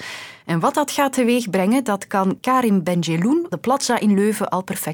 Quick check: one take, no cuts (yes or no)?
no